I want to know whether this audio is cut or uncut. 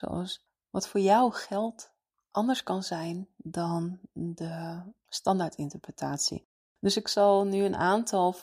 uncut